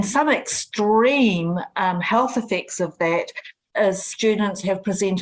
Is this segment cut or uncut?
uncut